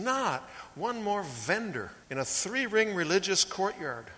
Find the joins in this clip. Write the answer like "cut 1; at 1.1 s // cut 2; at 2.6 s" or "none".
cut 1; at 2.0 s